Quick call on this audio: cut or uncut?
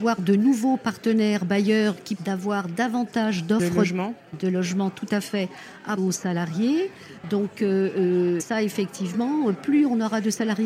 cut